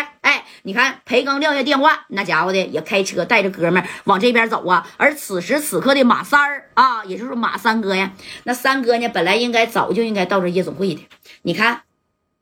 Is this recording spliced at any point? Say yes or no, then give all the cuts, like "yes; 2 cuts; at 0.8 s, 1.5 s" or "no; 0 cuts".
no; 0 cuts